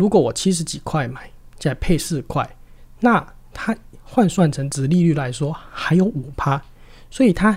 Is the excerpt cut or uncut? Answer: uncut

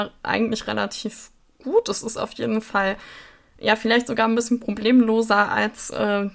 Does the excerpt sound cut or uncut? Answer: uncut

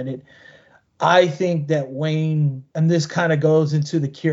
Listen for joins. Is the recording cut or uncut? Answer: cut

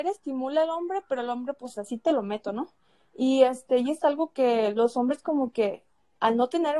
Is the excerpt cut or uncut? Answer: uncut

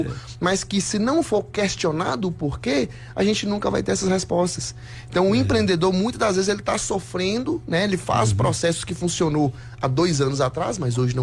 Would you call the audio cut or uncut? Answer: uncut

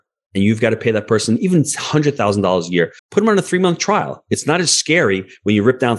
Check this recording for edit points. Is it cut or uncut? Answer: cut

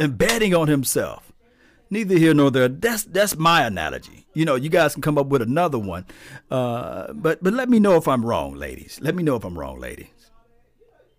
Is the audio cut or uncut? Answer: uncut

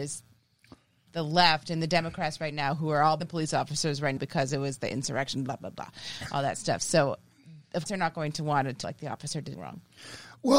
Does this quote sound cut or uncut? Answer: cut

